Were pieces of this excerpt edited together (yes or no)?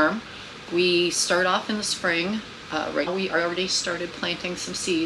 yes